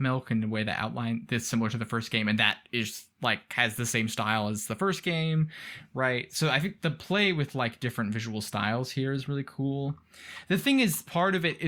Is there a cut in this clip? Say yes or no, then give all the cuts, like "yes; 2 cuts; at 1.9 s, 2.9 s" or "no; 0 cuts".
no; 0 cuts